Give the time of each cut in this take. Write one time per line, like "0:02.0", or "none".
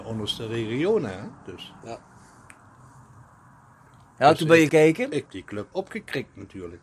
0:04.7
0:05.3
0:05.7

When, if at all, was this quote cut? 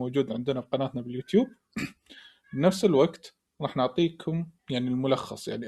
0:04.6

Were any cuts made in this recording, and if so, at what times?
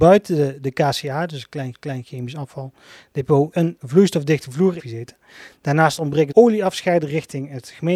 0:01.7
0:03.5
0:04.8
0:06.3

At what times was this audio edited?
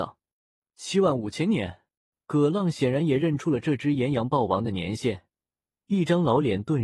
0:02.0

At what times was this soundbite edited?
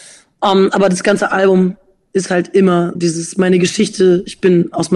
0:02.9

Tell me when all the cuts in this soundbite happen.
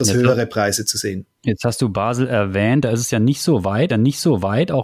0:01.3
0:03.9

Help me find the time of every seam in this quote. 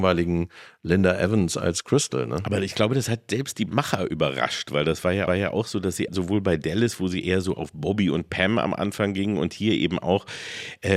0:05.3
0:06.1

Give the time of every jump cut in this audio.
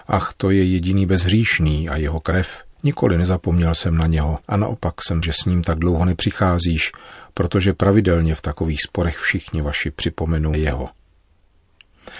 0:02.7
0:04.4
0:05.2
0:10.5

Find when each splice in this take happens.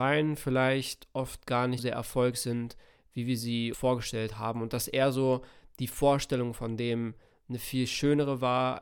0:01.8
0:03.7

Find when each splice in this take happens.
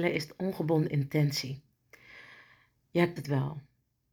0:03.2

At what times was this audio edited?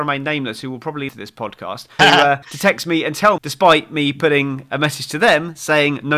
0:01.1
0:02.0
0:02.4
0:03.4

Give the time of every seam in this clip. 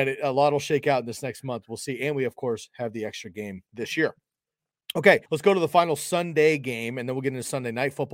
0:03.7
0:05.3

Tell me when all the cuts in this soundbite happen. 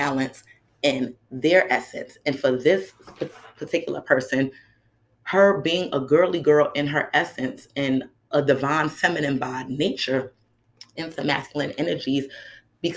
0:11.0

